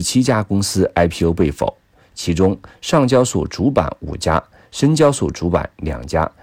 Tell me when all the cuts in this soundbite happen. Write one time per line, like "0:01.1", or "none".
none